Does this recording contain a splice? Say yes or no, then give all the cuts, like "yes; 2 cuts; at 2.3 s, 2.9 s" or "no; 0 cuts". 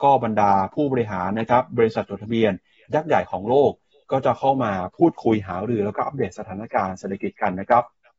no; 0 cuts